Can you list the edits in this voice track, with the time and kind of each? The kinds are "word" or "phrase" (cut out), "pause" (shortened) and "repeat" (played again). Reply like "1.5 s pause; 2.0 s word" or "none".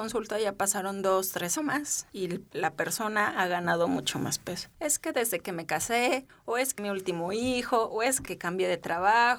1.6 s phrase; 6.8 s phrase; 8.3 s word